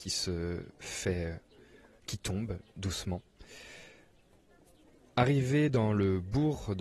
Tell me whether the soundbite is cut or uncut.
uncut